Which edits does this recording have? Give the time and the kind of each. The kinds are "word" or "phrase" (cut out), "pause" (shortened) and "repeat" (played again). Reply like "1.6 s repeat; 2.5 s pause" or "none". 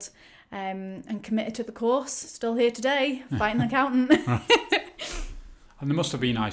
none